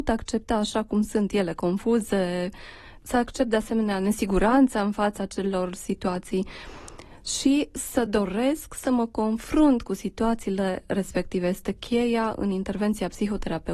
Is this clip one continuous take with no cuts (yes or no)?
yes